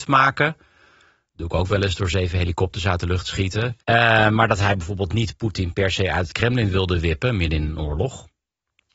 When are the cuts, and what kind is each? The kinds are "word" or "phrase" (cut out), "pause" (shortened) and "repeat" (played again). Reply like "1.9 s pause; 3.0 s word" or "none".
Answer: 3.8 s pause